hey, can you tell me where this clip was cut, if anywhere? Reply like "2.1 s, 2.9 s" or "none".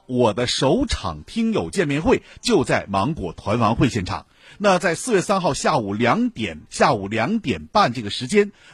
6.7 s